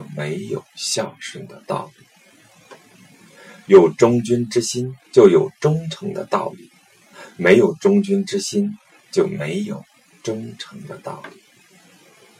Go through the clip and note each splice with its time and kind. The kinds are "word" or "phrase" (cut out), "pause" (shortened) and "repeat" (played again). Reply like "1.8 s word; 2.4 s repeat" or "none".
5.0 s pause